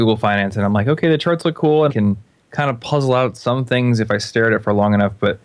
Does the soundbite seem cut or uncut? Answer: cut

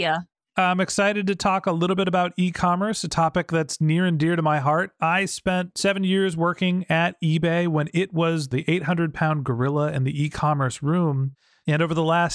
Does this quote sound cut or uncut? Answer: uncut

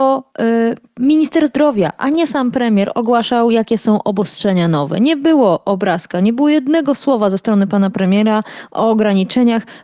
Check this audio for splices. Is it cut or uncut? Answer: uncut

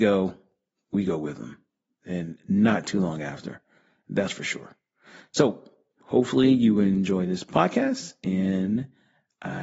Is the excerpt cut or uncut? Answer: uncut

